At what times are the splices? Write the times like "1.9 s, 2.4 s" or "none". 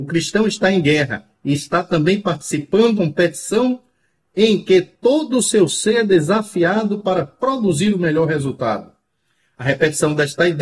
3.0 s